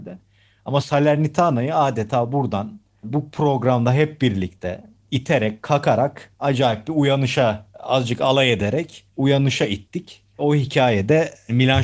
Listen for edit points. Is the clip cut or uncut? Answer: cut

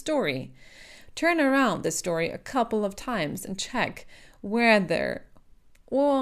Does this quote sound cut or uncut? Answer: uncut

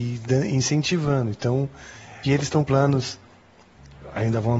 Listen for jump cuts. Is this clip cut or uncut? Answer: cut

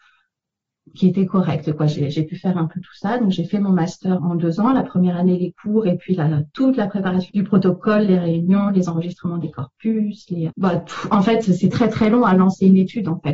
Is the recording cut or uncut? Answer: cut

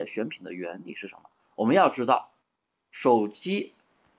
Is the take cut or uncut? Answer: uncut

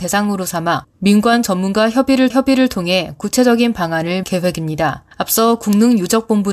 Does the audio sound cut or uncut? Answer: cut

